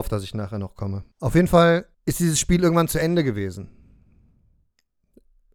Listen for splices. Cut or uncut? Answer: cut